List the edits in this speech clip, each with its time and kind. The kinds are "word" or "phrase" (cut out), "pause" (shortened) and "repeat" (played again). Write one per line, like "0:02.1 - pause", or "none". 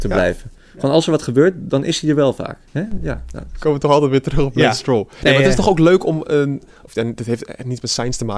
0:02.7 - pause